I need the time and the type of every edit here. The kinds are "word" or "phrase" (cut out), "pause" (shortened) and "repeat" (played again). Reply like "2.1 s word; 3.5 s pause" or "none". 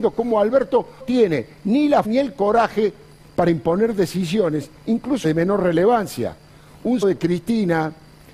1.0 s word; 2.0 s word; 5.2 s word; 7.0 s word